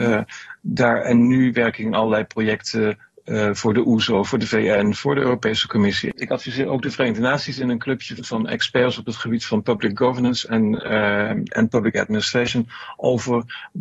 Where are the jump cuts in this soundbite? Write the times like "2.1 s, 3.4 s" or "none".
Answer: 8.2 s